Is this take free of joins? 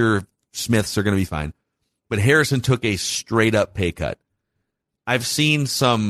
yes; 0 cuts

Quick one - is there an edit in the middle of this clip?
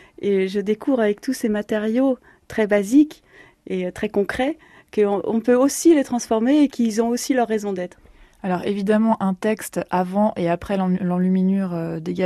no; 0 cuts

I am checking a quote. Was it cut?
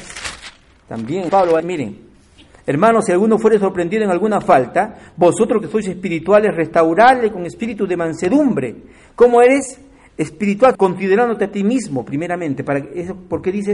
yes; 3 cuts; at 1.3 s, 1.6 s, 10.7 s

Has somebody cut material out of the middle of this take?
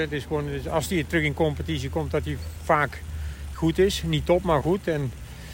yes; 2 cuts; at 3.5 s, 4.6 s

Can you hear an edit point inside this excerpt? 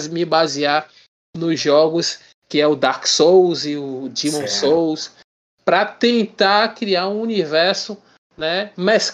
no; 0 cuts

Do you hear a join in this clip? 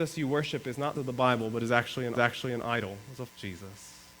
yes; 3 cuts; at 0.9 s, 2.1 s, 3.3 s

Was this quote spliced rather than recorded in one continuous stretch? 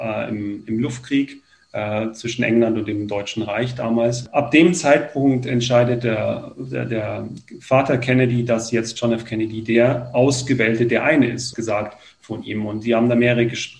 yes; 1 cut; at 11.5 s

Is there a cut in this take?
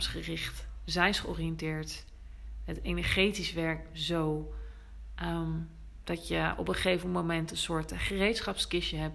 no; 0 cuts

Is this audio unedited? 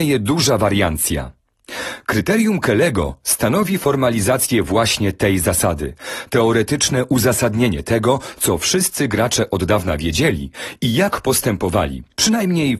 yes; 0 cuts

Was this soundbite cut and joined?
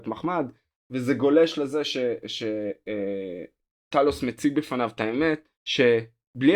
yes; 1 cut; at 5.5 s

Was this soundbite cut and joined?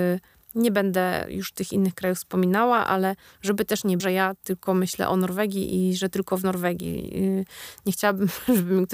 yes; 1 cut; at 4.0 s

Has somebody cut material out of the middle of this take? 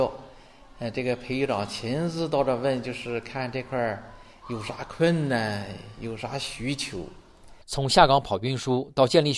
yes; 1 cut; at 7.6 s

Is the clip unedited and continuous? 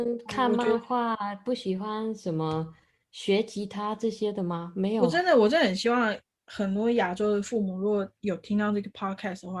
yes; 0 cuts

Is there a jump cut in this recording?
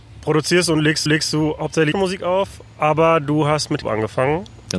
yes; 3 cuts; at 1.1 s, 1.9 s, 3.8 s

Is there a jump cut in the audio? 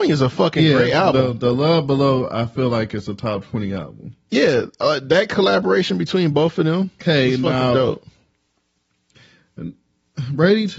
no; 0 cuts

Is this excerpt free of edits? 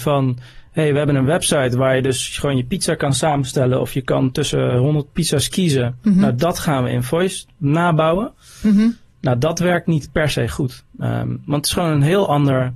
yes; 0 cuts

